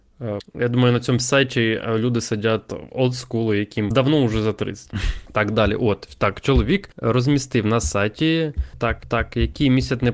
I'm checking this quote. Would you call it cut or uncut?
cut